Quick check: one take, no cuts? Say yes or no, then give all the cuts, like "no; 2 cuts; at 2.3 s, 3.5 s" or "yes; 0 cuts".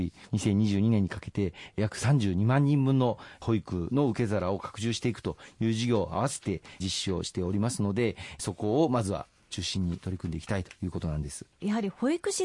no; 1 cut; at 11.5 s